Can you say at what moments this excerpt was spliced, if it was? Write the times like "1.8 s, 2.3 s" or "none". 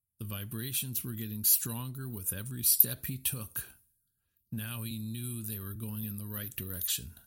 none